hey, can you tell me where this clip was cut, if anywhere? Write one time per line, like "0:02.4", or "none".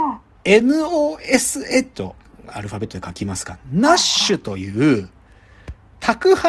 0:01.9